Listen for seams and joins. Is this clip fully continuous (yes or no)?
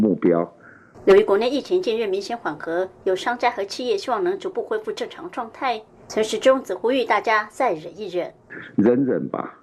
yes